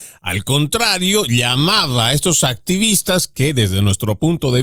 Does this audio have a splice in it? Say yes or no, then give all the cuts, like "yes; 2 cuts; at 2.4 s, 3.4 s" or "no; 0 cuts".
no; 0 cuts